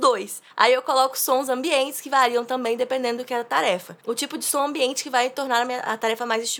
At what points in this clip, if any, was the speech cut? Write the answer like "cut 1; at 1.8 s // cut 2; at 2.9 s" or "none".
cut 1; at 4.0 s

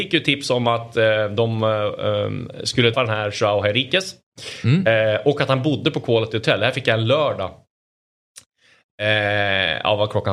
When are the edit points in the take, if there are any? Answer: cut 1; at 2.9 s

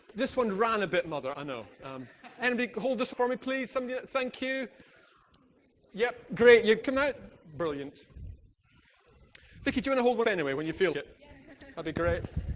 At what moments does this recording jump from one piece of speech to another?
cut 1; at 1.3 s // cut 2; at 2.4 s // cut 3; at 3.1 s // cut 4; at 4.1 s // cut 5; at 6.8 s // cut 6; at 10.2 s // cut 7; at 10.9 s

